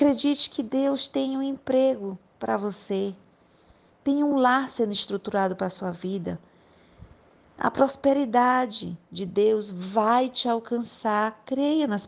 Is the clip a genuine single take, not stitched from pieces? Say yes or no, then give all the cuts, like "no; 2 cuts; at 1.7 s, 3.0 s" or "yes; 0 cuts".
yes; 0 cuts